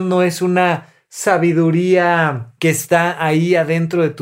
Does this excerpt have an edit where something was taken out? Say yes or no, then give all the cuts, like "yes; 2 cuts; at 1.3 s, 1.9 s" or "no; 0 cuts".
yes; 1 cut; at 2.6 s